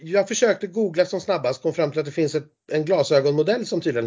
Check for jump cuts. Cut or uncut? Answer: uncut